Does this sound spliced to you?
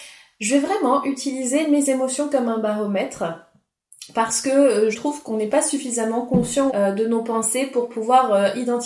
yes; 2 cuts; at 4.9 s, 6.7 s

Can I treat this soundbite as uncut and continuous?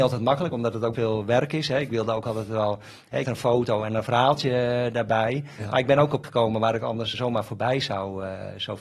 no; 4 cuts; at 0.9 s, 3.2 s, 6.2 s, 7.1 s

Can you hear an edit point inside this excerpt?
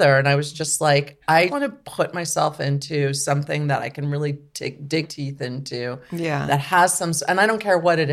yes; 2 cuts; at 1.5 s, 5.0 s

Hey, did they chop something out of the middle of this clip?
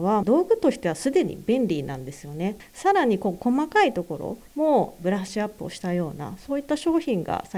no; 0 cuts

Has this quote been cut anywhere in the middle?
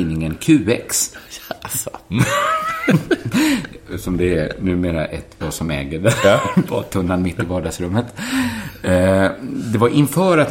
yes; 1 cut; at 5.4 s

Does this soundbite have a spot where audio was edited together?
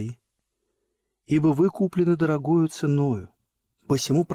no; 0 cuts

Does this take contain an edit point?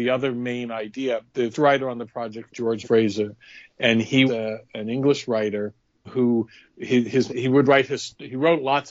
yes; 6 cuts; at 1.5 s, 2.5 s, 2.8 s, 4.3 s, 6.1 s, 7.3 s

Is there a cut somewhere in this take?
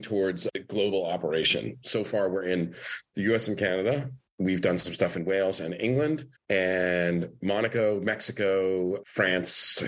no; 0 cuts

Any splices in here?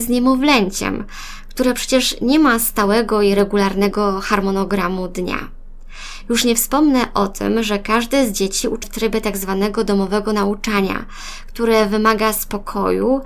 yes; 1 cut; at 8.8 s

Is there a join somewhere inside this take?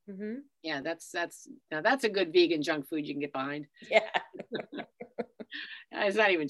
no; 0 cuts

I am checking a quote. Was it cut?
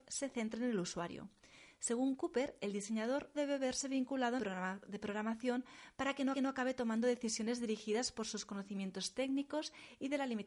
yes; 3 cuts; at 3.3 s, 4.4 s, 6.3 s

